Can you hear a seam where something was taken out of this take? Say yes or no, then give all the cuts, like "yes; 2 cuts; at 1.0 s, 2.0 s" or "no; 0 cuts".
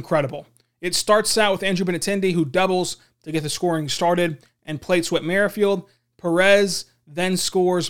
no; 0 cuts